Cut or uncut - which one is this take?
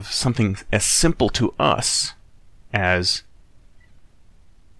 uncut